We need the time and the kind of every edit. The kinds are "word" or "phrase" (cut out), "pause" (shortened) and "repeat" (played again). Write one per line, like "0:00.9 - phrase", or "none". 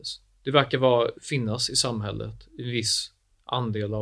0:01.2 - pause